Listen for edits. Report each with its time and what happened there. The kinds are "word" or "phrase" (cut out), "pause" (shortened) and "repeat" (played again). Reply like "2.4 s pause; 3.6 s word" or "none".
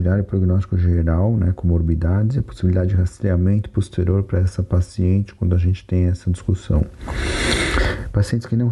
none